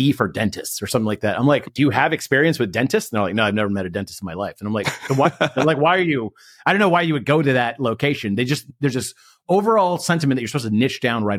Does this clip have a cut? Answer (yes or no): no